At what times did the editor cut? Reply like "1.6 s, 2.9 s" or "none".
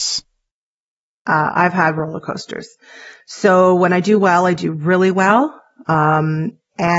none